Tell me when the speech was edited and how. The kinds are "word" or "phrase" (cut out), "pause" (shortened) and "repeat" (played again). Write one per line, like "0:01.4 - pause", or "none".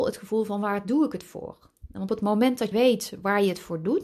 0:02.1 - word
0:02.7 - word